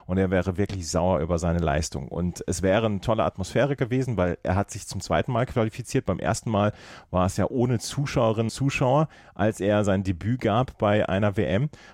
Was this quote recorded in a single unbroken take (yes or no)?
no